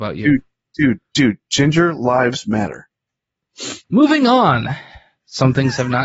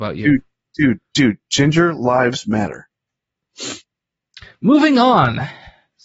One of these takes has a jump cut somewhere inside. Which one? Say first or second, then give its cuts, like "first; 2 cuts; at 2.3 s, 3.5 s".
first; 1 cut; at 3.8 s